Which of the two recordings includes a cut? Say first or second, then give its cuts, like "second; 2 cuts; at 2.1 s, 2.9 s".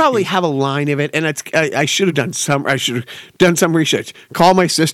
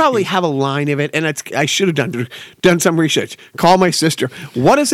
second; 2 cuts; at 1.5 s, 2.1 s